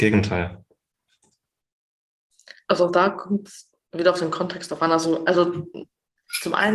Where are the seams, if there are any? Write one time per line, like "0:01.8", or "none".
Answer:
none